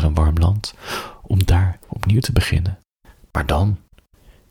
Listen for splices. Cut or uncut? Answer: uncut